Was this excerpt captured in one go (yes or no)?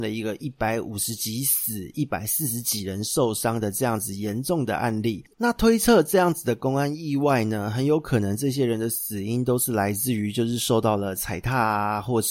no